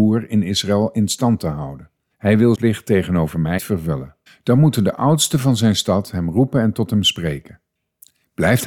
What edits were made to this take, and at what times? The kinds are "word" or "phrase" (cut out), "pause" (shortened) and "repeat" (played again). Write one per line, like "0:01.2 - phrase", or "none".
0:02.1 - pause
0:02.5 - word
0:03.6 - word
0:04.3 - pause